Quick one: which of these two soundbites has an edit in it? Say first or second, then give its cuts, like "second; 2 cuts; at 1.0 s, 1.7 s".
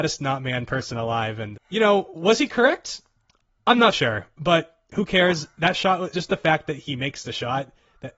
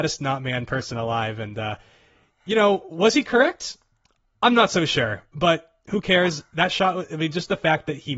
first; 3 cuts; at 1.5 s, 3.9 s, 6.1 s